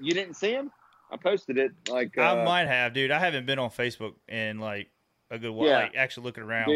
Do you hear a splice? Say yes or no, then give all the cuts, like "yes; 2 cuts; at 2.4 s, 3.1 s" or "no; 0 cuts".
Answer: no; 0 cuts